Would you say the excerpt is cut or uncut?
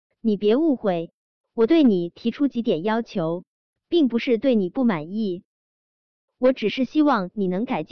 uncut